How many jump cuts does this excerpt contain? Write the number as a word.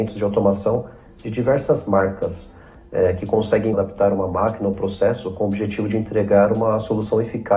one